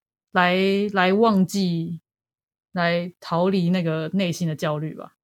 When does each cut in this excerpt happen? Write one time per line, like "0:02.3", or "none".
none

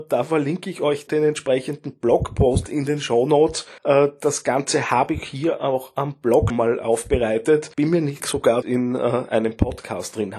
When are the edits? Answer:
0:01.1
0:03.8
0:06.5
0:07.7
0:08.2
0:08.6

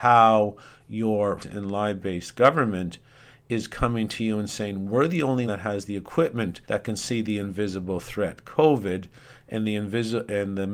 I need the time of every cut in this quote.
0:01.4
0:05.5
0:06.6

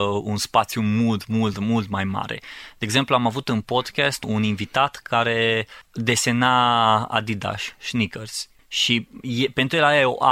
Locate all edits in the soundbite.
none

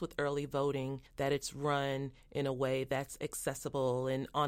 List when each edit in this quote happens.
0:01.1

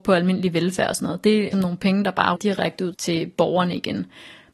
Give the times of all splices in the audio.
0:01.5
0:02.4
0:02.9

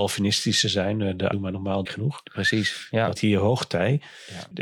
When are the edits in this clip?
0:01.3
0:01.9
0:03.2

